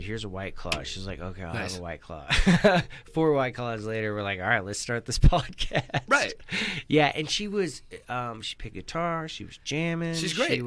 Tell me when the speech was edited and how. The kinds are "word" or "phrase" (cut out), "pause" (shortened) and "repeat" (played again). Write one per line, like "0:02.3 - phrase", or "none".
0:08.7 - phrase